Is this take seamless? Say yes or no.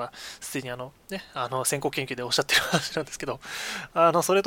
yes